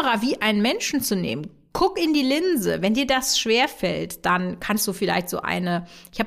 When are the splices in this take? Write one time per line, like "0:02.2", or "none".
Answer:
none